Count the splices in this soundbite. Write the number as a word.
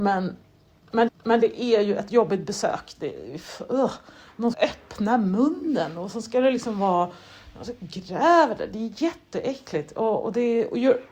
two